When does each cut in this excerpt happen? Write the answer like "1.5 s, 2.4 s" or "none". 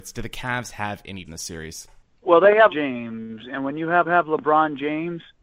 1.2 s, 2.7 s, 4.0 s